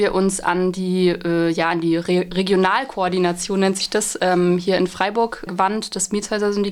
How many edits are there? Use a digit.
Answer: 1